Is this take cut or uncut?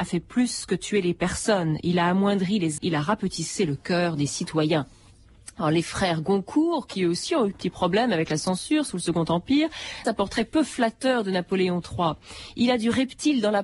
cut